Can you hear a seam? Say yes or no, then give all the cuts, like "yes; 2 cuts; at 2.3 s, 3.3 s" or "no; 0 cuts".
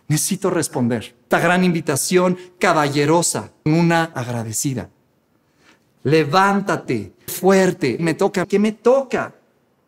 yes; 6 cuts; at 1.3 s, 3.7 s, 4.1 s, 7.3 s, 8.0 s, 8.4 s